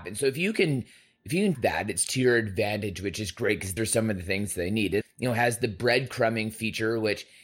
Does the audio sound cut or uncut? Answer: cut